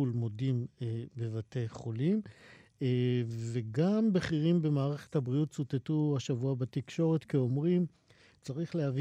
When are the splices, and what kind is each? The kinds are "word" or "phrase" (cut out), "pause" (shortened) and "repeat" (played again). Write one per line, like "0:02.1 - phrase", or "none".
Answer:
none